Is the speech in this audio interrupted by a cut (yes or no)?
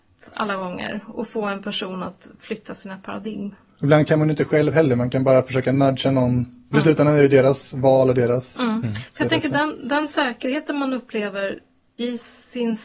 no